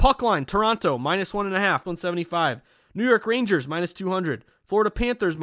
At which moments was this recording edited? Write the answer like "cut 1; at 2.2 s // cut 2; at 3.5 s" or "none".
cut 1; at 1.8 s